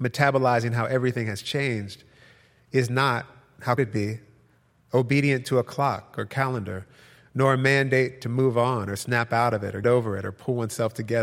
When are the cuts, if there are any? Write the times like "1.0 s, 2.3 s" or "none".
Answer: 3.8 s, 9.8 s

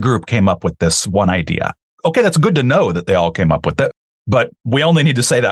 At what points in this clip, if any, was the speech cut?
none

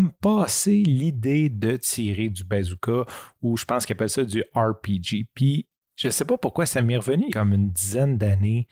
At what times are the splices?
7.3 s

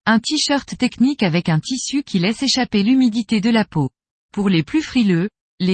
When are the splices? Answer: 4.1 s

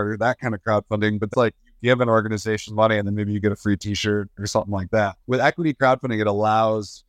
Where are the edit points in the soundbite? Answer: 1.3 s, 2.7 s, 5.2 s

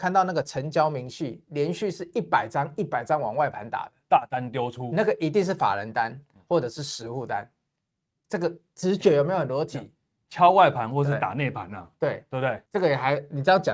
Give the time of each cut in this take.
12.7 s

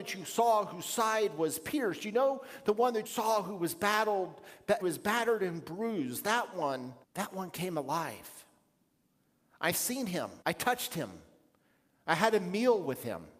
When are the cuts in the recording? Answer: 3.1 s, 4.8 s, 7.0 s, 10.4 s

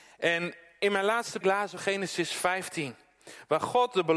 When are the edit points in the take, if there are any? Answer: 1.4 s, 1.8 s

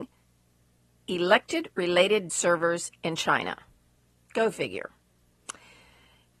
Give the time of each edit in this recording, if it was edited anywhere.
2.3 s, 4.0 s

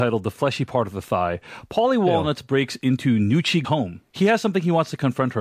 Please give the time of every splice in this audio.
3.6 s

